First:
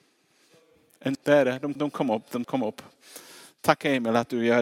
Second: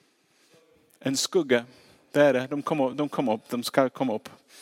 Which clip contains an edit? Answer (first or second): first